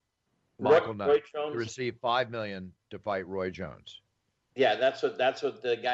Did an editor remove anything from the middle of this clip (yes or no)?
no